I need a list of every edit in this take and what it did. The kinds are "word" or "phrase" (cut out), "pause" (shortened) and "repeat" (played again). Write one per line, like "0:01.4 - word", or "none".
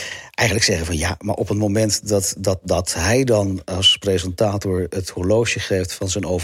none

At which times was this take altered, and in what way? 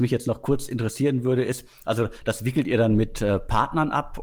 none

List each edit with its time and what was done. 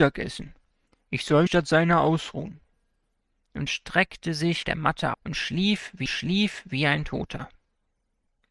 0:01.5 - word
0:03.7 - word
0:04.6 - word
0:05.1 - word
0:06.1 - repeat

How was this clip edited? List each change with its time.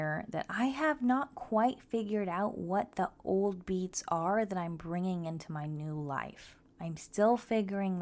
none

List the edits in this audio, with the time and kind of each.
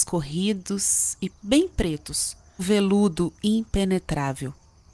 0:01.3 - word
0:02.6 - word

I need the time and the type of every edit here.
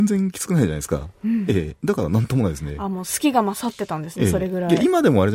none

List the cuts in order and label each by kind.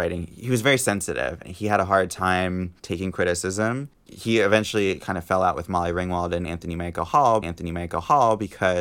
0:01.4 - word
0:02.8 - pause
0:04.1 - word
0:07.4 - repeat

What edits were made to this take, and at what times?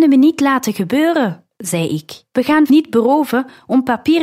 0:01.5 - pause
0:02.3 - pause
0:02.7 - word

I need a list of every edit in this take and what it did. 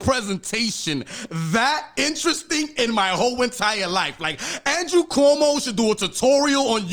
none

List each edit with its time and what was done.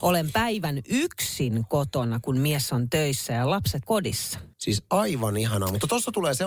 0:03.9 - word
0:04.5 - pause

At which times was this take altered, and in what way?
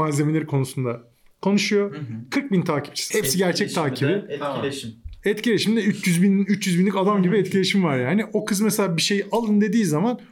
0:03.1 - phrase

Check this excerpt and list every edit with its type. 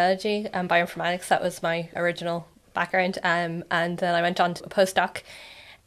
0:02.0 - word
0:04.6 - word

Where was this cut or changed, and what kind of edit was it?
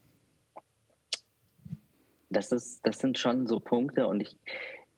0:01.9 - pause

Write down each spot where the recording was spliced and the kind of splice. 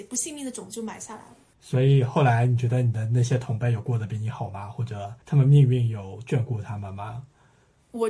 0:05.2 - pause

